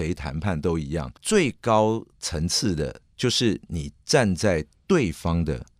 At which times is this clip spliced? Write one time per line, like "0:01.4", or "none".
0:01.2